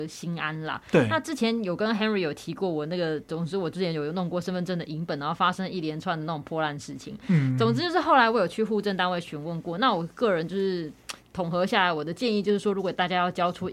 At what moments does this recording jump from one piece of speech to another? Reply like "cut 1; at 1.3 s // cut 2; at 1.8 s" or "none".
none